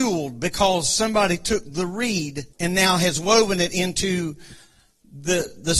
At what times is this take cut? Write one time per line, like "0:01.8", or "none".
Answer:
0:02.5